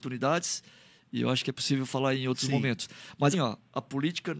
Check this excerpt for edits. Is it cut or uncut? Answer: cut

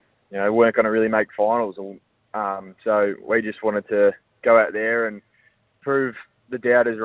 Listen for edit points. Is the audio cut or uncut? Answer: uncut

